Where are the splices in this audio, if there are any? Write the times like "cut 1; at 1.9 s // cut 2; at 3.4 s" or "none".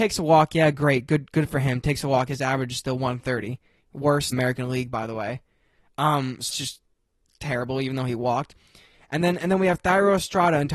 cut 1; at 4.3 s // cut 2; at 6.5 s